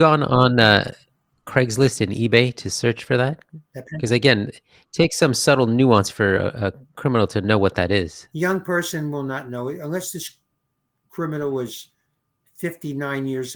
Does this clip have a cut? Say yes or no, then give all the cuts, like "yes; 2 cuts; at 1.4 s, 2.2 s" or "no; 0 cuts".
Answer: no; 0 cuts